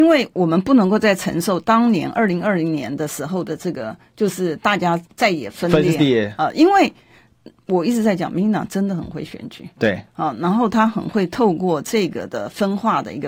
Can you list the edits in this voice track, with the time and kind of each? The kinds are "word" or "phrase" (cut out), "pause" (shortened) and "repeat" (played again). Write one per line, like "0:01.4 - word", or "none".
0:05.1 - pause